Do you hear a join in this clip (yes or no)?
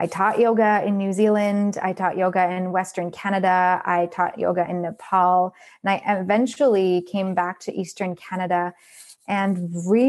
no